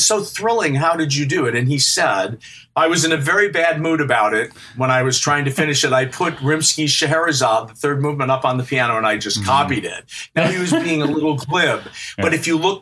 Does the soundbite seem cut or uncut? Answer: uncut